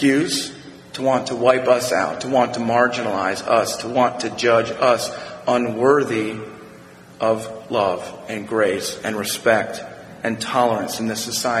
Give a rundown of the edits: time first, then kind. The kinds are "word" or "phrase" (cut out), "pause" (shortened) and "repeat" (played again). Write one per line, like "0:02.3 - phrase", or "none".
none